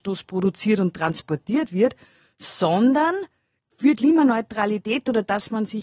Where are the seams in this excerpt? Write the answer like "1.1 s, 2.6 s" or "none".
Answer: 4.0 s